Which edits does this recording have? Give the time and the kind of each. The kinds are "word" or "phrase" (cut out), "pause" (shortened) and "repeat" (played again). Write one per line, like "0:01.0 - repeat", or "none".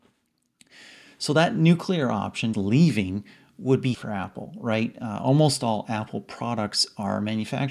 0:02.5 - word
0:03.9 - word

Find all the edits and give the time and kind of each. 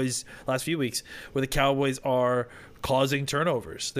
none

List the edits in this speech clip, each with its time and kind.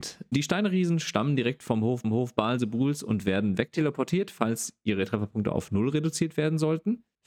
0:02.0 - repeat

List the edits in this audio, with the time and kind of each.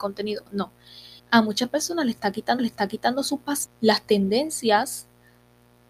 0:01.2 - pause
0:02.6 - repeat
0:03.7 - word

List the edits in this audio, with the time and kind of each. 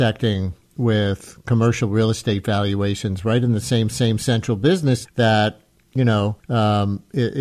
0:03.9 - repeat
0:05.1 - word
0:06.4 - pause

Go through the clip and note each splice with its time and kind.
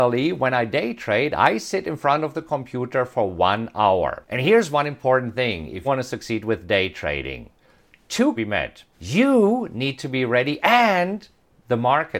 0:05.8 - word
0:08.4 - phrase
0:08.9 - pause

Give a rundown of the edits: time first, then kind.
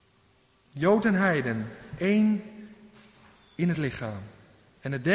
none

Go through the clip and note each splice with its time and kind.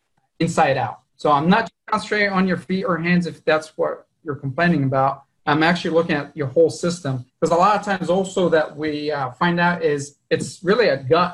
0:01.0 - pause
0:07.3 - pause

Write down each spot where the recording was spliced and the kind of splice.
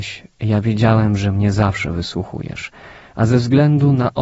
none

